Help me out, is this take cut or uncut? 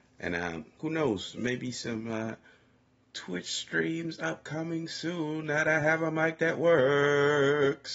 uncut